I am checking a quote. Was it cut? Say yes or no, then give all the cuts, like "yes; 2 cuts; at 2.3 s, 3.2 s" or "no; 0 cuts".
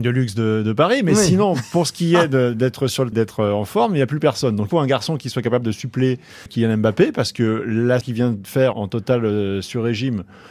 yes; 5 cuts; at 3.1 s, 4.7 s, 6.5 s, 8.0 s, 8.7 s